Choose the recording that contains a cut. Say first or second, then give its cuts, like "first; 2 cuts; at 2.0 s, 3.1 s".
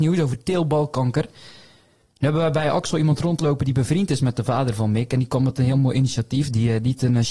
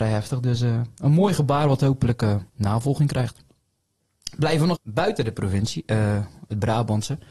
second; 2 cuts; at 2.5 s, 4.7 s